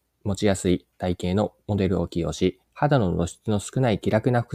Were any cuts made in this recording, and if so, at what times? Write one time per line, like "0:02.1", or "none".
0:02.6

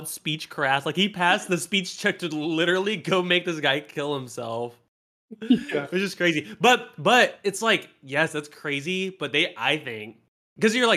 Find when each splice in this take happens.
none

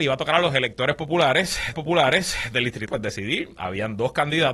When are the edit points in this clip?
0:01.7
0:02.9

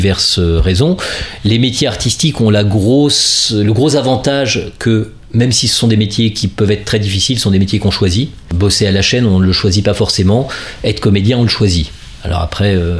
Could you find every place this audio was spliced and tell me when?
none

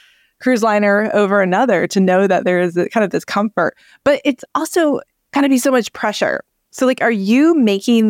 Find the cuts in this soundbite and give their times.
none

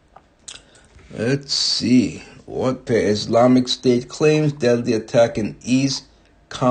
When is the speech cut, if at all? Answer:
0:02.9

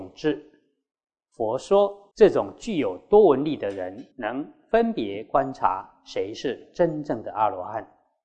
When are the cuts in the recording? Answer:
0:02.1
0:04.1

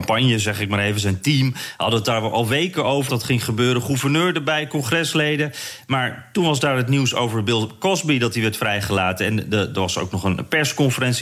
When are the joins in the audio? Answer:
0:03.1

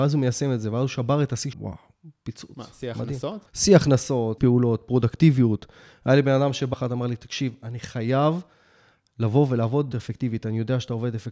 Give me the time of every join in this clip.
0:01.5
0:03.5
0:04.4
0:06.7
0:09.9

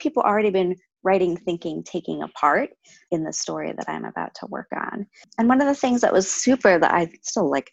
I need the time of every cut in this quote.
0:03.1

